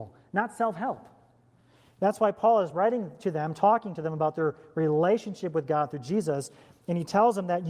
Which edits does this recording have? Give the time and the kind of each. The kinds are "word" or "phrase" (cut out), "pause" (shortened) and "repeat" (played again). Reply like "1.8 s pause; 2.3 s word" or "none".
none